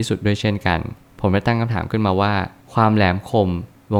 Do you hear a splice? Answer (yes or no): no